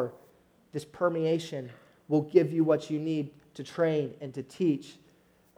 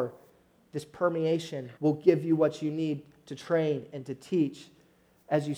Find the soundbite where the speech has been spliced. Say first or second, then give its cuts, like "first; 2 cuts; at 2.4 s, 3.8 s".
second; 1 cut; at 1.8 s